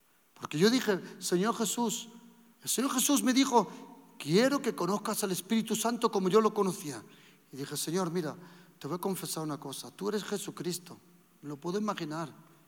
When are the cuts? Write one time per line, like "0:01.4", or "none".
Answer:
none